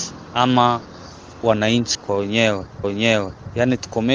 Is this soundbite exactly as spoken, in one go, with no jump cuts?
no; 2 cuts; at 1.9 s, 2.8 s

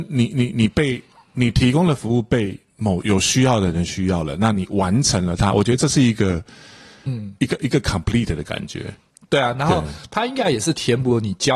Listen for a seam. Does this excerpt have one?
no; 0 cuts

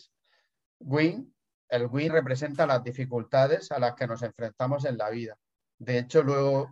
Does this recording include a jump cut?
yes; 1 cut; at 2.1 s

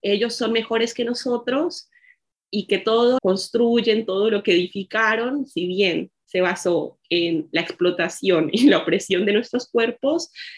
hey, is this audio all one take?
no; 1 cut; at 3.2 s

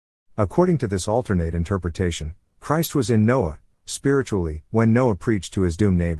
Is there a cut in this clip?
yes; 1 cut; at 4.7 s

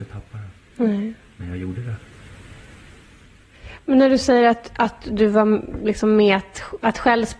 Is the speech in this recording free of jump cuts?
yes; 0 cuts

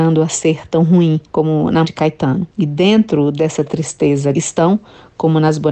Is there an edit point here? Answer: yes; 4 cuts; at 1.3 s, 1.8 s, 2.5 s, 4.3 s

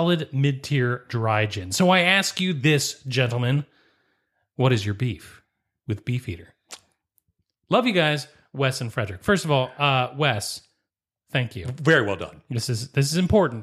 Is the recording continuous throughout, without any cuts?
yes; 0 cuts

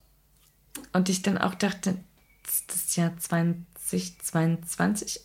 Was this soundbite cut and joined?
no; 0 cuts

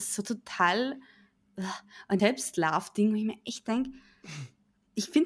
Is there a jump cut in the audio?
yes; 1 cut; at 2.2 s

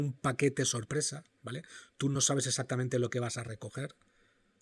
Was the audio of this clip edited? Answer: no; 0 cuts

